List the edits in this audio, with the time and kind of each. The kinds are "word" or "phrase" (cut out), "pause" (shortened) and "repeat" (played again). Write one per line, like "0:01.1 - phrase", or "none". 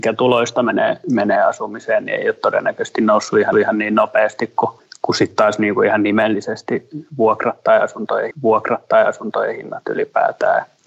0:03.5 - repeat
0:04.8 - pause
0:08.3 - repeat